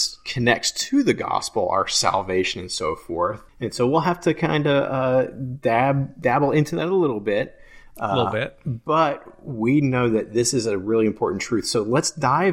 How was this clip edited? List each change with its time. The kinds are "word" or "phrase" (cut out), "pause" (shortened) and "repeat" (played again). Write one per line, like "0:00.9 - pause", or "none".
0:03.5 - pause